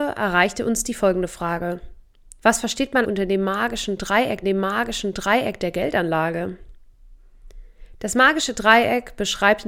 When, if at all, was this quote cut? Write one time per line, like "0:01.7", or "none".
0:02.4
0:03.0
0:04.4